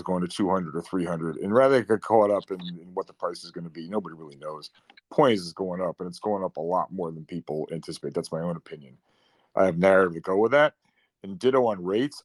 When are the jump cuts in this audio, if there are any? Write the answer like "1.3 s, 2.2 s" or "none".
none